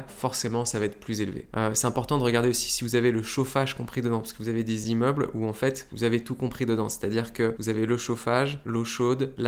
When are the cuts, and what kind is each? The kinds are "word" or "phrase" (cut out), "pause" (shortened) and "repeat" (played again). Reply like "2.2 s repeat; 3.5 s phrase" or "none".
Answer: none